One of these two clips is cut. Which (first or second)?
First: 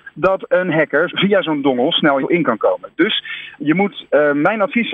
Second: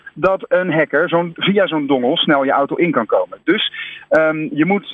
first